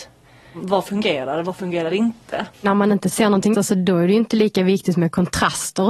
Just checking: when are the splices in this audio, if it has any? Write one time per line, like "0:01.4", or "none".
0:02.5
0:03.5